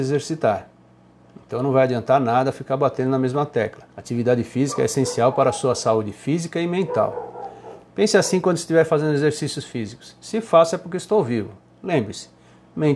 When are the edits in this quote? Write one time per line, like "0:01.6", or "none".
0:03.9